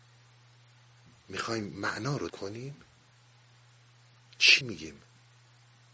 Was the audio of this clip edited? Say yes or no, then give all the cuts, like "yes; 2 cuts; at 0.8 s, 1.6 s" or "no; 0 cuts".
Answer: yes; 2 cuts; at 2.3 s, 4.6 s